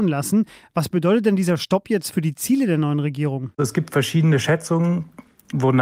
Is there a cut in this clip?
no; 0 cuts

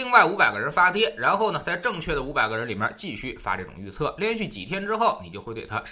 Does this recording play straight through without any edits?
yes; 0 cuts

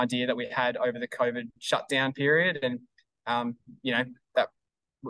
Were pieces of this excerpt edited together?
no; 0 cuts

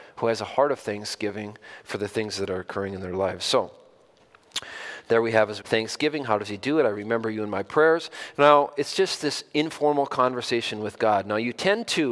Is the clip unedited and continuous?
no; 1 cut; at 5.6 s

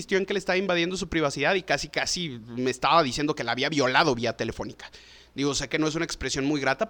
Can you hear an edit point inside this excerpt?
no; 0 cuts

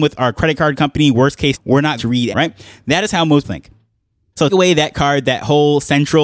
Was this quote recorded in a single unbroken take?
no; 6 cuts; at 1.5 s, 2.0 s, 2.3 s, 3.4 s, 4.5 s, 4.9 s

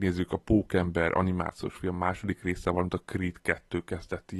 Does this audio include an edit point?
no; 0 cuts

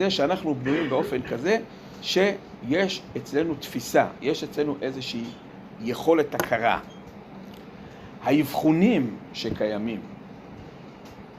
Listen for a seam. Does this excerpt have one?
no; 0 cuts

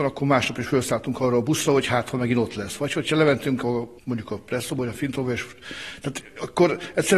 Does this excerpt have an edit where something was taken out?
yes; 1 cut; at 4.0 s

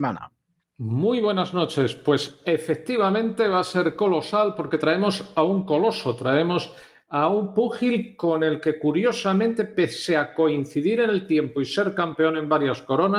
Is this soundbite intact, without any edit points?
yes; 0 cuts

